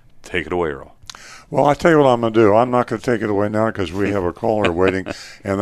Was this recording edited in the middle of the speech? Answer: no; 0 cuts

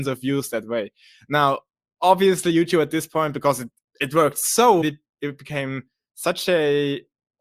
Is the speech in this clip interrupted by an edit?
yes; 1 cut; at 4.8 s

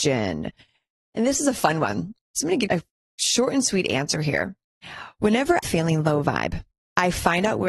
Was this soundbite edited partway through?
yes; 2 cuts; at 2.7 s, 5.6 s

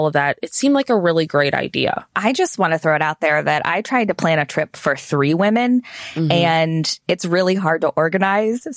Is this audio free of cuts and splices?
no; 1 cut; at 2.1 s

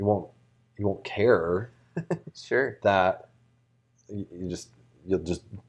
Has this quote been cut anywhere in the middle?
no; 0 cuts

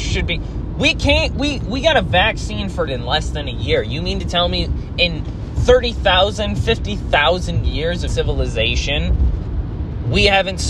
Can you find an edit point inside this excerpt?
yes; 2 cuts; at 2.9 s, 8.1 s

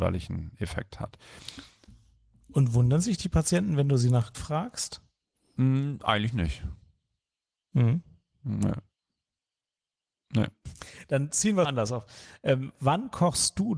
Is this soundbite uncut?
no; 2 cuts; at 4.3 s, 11.6 s

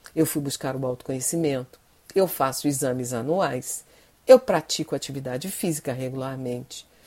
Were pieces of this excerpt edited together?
no; 0 cuts

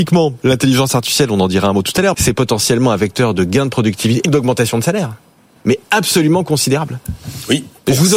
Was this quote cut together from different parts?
yes; 2 cuts; at 2.1 s, 4.2 s

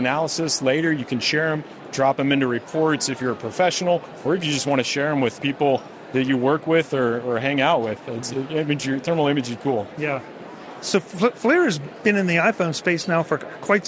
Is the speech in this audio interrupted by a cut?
yes; 2 cuts; at 5.4 s, 9.6 s

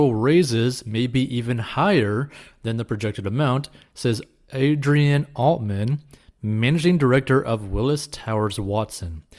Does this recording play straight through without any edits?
yes; 0 cuts

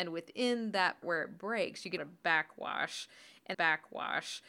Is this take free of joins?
no; 3 cuts; at 1.0 s, 2.0 s, 3.5 s

